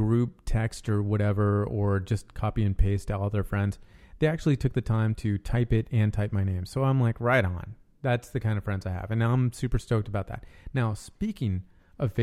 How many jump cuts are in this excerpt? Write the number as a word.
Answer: zero